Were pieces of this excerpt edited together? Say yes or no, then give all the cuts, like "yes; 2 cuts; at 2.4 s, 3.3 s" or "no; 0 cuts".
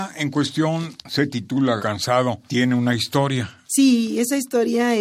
yes; 4 cuts; at 1.0 s, 1.8 s, 2.5 s, 3.6 s